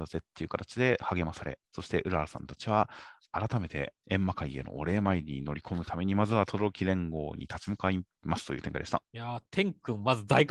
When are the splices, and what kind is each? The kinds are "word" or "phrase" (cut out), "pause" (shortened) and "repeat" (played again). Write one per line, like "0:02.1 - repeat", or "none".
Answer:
0:01.6 - pause
0:04.0 - pause
0:09.1 - pause